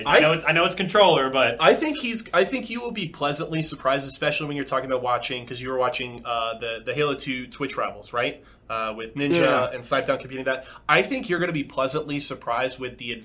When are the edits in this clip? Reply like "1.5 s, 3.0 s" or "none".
none